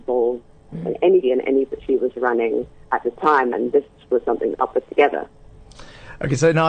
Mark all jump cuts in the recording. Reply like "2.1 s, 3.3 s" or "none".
1.2 s, 1.7 s, 3.5 s, 4.5 s

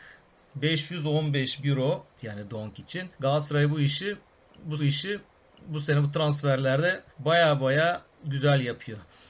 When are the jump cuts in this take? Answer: 1.6 s, 2.2 s, 3.1 s, 4.8 s, 7.1 s, 8.1 s

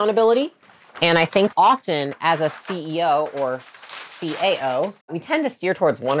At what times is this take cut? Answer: 1.5 s, 5.0 s

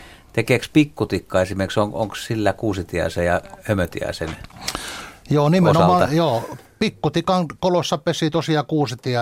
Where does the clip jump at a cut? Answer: none

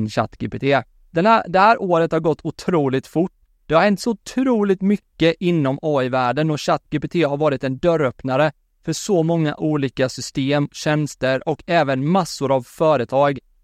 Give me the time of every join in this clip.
none

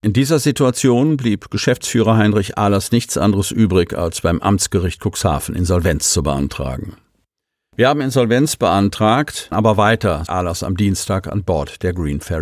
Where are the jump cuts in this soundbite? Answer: 9.5 s, 10.3 s

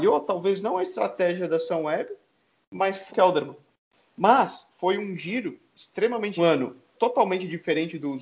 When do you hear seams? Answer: 3.1 s, 6.4 s

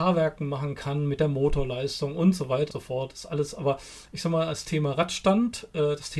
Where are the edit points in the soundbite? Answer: 2.7 s

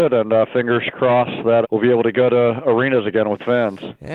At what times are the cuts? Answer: 1.6 s

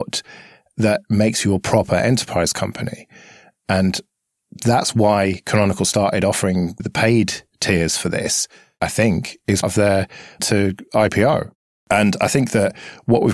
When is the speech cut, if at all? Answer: 6.8 s, 9.6 s, 10.4 s

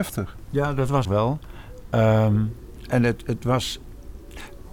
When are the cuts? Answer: 1.0 s

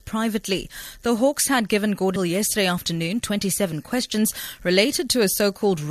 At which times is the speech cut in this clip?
2.2 s, 3.2 s

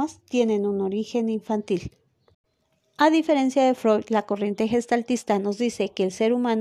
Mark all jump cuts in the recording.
none

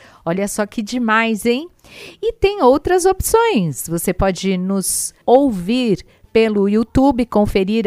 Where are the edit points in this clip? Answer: 5.2 s

